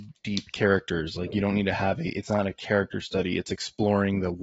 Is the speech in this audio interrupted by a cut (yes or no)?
no